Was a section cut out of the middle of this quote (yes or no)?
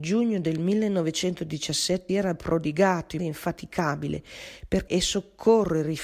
yes